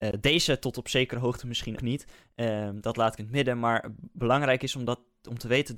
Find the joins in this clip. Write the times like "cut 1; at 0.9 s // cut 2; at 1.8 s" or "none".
cut 1; at 1.8 s // cut 2; at 3.2 s

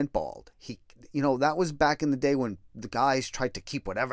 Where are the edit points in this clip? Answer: none

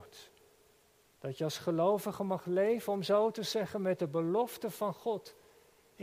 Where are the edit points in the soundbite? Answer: none

